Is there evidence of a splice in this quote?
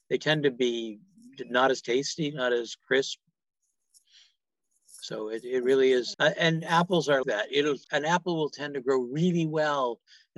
yes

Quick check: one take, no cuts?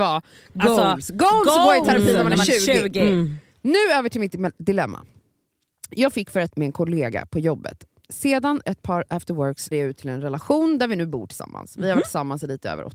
no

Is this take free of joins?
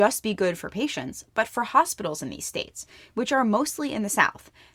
yes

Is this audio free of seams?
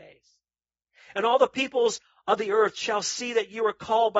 yes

